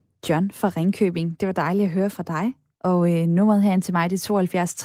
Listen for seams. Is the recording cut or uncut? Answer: uncut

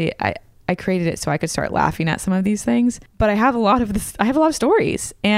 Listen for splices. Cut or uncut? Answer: uncut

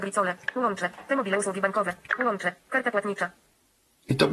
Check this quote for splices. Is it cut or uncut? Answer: uncut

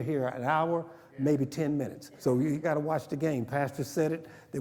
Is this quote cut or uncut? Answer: cut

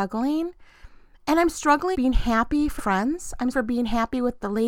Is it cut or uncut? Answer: cut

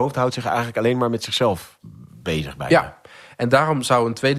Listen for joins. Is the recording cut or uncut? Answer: uncut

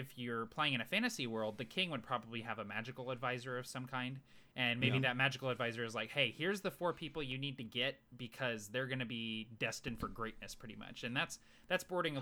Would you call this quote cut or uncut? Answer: uncut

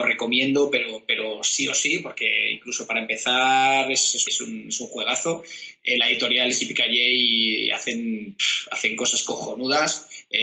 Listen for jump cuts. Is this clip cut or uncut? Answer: cut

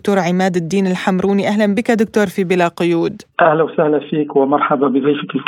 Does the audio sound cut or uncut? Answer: uncut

